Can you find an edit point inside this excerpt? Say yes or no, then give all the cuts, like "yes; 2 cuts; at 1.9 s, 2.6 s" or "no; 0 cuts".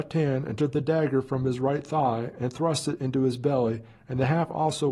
no; 0 cuts